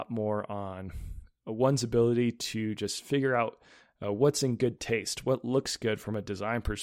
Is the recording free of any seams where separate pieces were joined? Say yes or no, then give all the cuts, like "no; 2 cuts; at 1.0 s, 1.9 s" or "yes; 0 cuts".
yes; 0 cuts